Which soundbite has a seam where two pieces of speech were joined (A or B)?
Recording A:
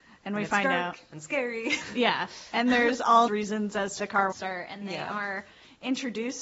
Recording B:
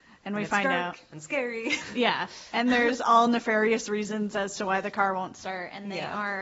A